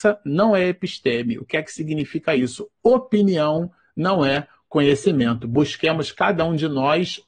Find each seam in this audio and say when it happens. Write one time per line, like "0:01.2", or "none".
none